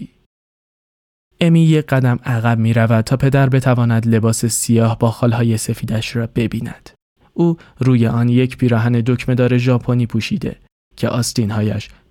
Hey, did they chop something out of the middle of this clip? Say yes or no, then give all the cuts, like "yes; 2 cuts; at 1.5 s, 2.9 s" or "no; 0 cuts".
no; 0 cuts